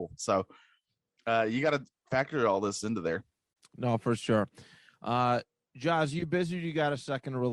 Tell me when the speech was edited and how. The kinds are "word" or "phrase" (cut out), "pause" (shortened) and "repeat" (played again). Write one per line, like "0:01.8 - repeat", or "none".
none